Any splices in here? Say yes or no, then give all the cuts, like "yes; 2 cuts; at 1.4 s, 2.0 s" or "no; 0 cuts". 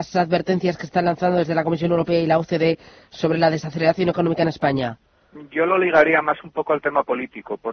no; 0 cuts